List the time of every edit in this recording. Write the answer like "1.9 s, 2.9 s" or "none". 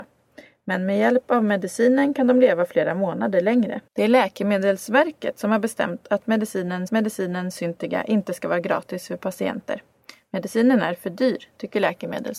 3.9 s, 6.9 s